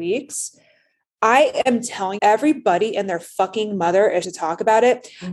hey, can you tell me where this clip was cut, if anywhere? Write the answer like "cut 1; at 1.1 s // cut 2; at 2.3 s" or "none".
cut 1; at 2.2 s // cut 2; at 4.2 s